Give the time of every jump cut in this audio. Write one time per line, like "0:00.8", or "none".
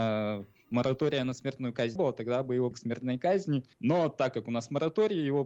0:02.0
0:02.7
0:03.7